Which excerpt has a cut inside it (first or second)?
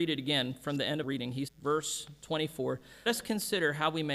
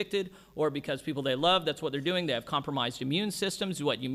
first